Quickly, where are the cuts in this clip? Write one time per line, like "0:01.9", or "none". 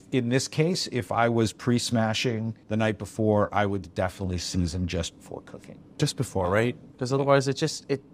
0:02.6